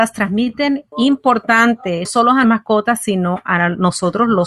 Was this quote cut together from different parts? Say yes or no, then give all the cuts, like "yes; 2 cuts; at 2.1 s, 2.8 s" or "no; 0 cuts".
yes; 3 cuts; at 0.9 s, 2.0 s, 2.4 s